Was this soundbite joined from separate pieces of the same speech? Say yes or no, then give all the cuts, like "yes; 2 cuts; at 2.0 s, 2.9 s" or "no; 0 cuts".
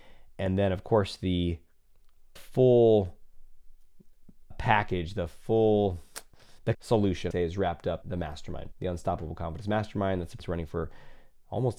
yes; 7 cuts; at 2.4 s, 4.5 s, 6.7 s, 7.3 s, 8.0 s, 8.7 s, 10.4 s